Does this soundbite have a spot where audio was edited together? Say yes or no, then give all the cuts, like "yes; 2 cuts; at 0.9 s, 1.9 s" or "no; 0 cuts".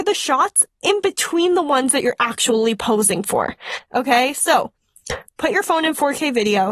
no; 0 cuts